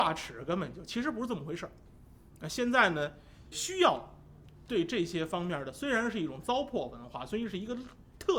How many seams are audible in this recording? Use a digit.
1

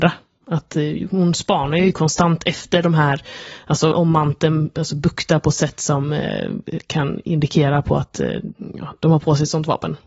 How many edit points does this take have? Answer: 1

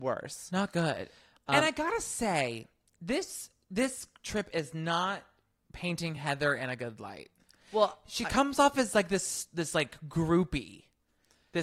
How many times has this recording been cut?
0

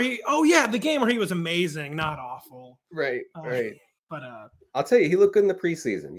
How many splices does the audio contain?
0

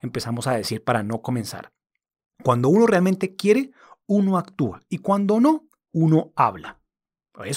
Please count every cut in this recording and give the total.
0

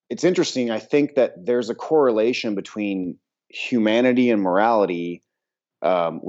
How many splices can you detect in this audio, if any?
0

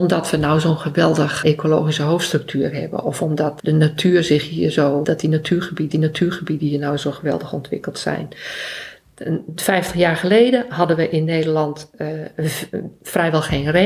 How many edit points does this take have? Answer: 4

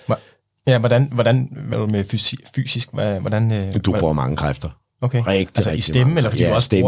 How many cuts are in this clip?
1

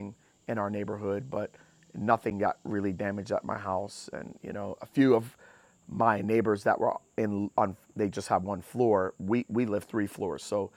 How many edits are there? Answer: 1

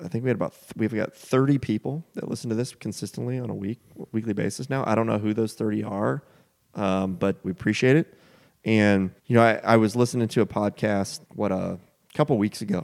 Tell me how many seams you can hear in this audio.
3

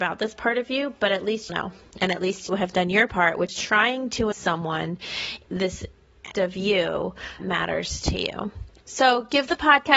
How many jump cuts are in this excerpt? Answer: 7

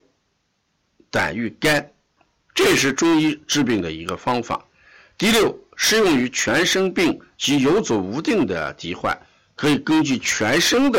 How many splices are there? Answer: 0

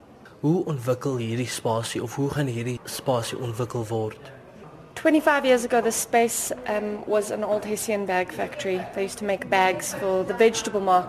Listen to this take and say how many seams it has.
0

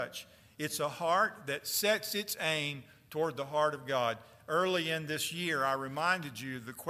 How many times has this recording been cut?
0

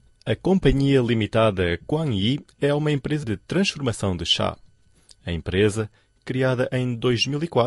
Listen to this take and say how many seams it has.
1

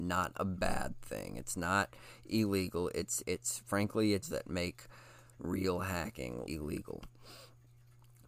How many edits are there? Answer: 3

